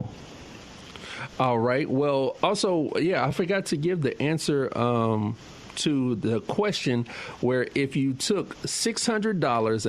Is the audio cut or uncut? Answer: uncut